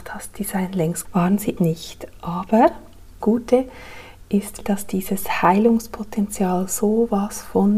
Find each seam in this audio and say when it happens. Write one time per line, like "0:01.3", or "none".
0:01.0
0:01.6
0:03.2
0:04.6